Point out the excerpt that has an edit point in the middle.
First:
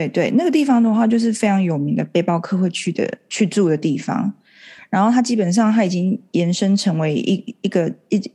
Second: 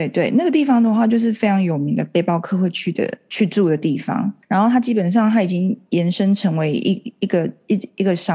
second; 1 cut; at 4.4 s

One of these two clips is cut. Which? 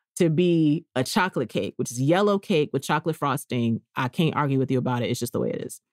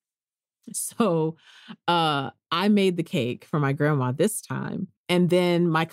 second; 1 cut; at 5.0 s

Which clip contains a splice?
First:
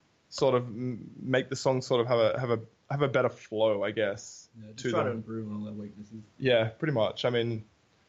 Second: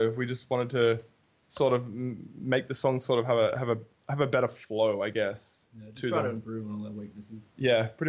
second; 1 cut; at 1.2 s

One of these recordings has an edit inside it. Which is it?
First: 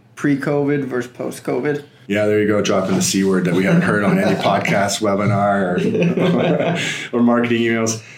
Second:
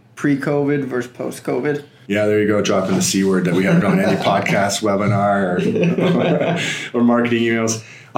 second; 1 cut; at 3.8 s

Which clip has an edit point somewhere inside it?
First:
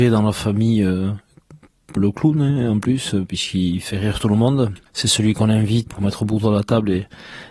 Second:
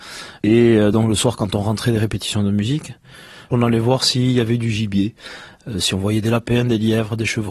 first; 3 cuts; at 2.0 s, 4.9 s, 5.9 s

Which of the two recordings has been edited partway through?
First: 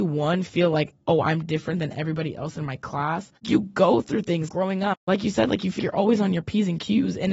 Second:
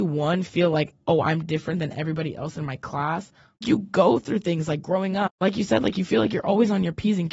first; 3 cuts; at 3.4 s, 4.5 s, 5.8 s

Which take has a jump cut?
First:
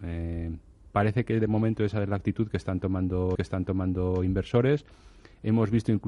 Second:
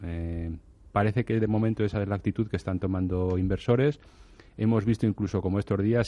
first; 1 cut; at 3.3 s

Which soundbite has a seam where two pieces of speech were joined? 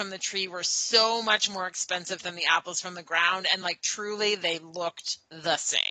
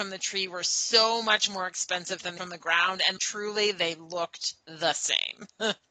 second; 2 cuts; at 2.4 s, 3.2 s

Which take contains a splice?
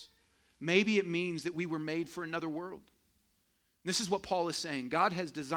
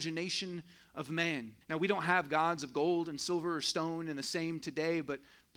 second; 1 cut; at 1.6 s

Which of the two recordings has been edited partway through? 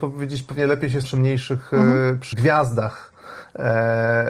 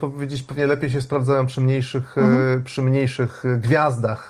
first; 2 cuts; at 1.0 s, 2.3 s

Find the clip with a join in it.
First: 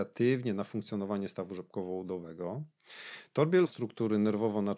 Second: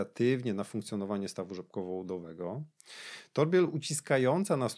first; 1 cut; at 3.7 s

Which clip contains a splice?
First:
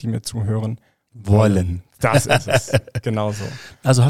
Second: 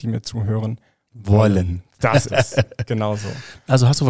second; 1 cut; at 2.3 s

